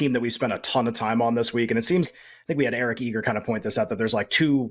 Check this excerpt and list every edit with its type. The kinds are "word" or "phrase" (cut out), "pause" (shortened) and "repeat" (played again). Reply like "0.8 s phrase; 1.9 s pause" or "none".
2.0 s word